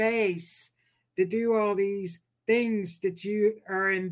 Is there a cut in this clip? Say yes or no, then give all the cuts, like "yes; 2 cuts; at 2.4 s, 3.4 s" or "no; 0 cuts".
no; 0 cuts